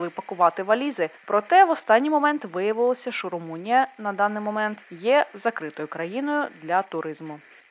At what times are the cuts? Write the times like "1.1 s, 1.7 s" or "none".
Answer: 1.2 s, 4.8 s